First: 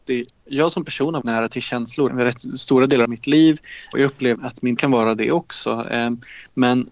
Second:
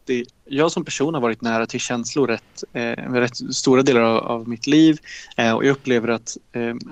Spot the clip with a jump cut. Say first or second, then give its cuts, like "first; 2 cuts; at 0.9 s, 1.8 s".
first; 6 cuts; at 1.2 s, 2.1 s, 3.0 s, 3.9 s, 4.4 s, 4.8 s